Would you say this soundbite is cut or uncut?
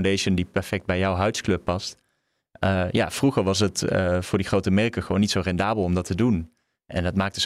uncut